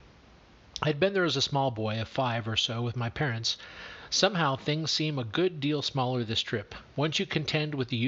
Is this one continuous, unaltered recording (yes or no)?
no